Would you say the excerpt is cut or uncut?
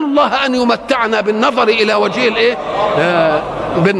uncut